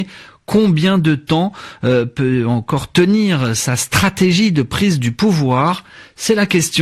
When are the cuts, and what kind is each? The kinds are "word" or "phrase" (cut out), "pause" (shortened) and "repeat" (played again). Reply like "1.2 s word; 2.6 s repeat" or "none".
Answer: none